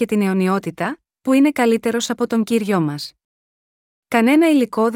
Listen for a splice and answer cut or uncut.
uncut